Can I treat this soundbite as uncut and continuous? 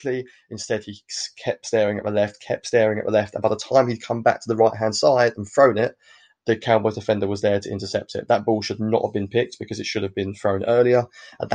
yes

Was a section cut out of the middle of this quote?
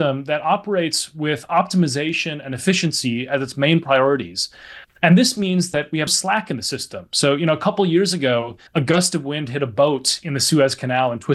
yes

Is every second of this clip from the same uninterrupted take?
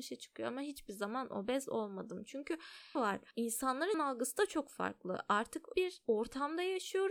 no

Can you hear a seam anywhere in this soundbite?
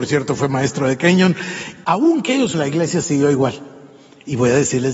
yes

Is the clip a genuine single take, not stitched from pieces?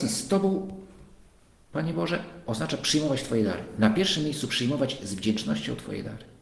yes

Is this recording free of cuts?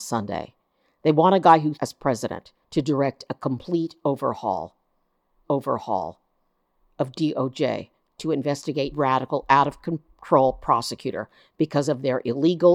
no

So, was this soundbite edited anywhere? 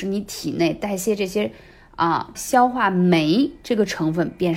yes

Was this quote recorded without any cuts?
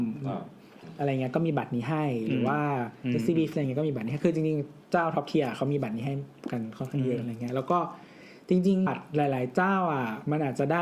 no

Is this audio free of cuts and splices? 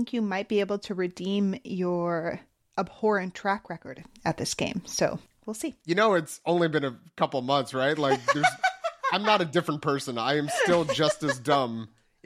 yes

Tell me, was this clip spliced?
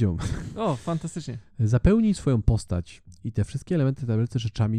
no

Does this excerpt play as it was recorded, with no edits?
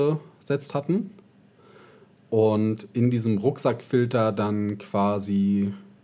yes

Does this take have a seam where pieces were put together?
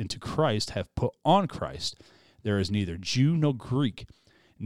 no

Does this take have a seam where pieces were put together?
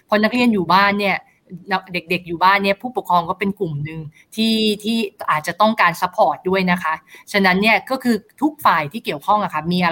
no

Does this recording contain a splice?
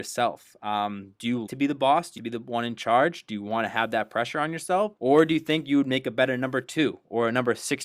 yes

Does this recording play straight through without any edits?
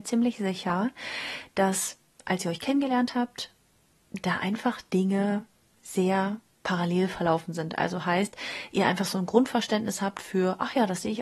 yes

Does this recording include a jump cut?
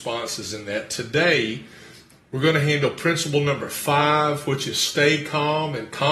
no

